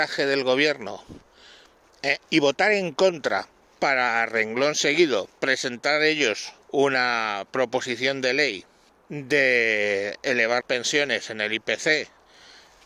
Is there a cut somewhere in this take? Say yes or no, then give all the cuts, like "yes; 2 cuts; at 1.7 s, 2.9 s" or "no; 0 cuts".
yes; 3 cuts; at 6.6 s, 8.9 s, 10.6 s